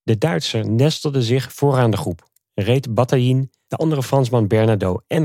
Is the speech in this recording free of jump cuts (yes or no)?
yes